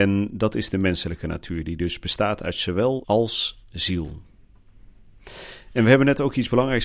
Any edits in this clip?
yes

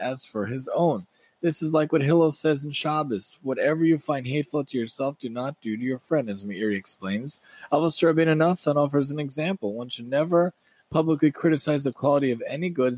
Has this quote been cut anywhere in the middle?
no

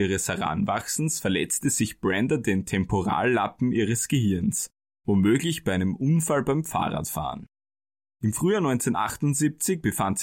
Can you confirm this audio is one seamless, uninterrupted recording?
yes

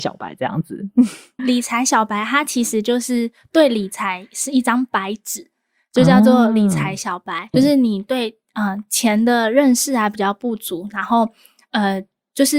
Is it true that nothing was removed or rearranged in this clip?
no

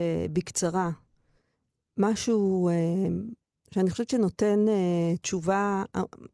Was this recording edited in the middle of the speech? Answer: no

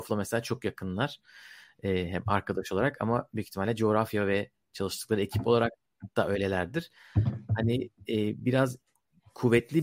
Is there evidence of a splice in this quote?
no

